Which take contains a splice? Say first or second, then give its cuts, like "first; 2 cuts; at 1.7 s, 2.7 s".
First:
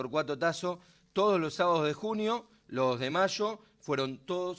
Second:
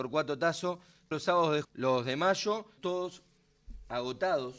second; 3 cuts; at 1.1 s, 1.6 s, 2.8 s